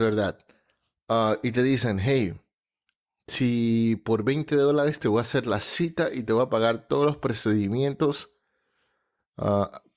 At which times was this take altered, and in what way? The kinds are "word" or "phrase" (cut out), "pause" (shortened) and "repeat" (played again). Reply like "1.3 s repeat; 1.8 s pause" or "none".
none